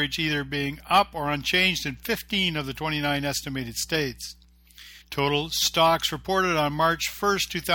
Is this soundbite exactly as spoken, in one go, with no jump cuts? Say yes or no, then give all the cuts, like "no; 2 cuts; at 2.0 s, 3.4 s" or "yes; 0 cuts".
no; 1 cut; at 5.0 s